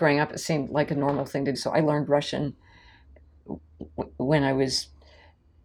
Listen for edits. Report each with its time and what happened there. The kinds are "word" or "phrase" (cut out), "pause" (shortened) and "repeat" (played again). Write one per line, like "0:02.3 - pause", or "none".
0:01.5 - word